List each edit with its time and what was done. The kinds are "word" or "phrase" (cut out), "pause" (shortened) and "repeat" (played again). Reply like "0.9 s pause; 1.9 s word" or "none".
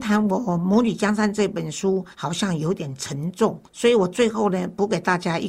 2.1 s pause; 3.7 s pause